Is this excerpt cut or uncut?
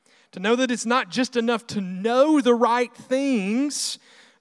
uncut